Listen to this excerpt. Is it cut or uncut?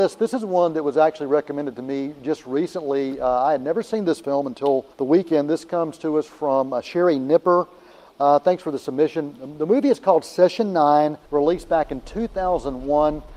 cut